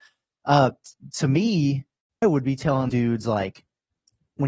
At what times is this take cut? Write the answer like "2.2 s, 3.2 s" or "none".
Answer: 2.2 s, 2.9 s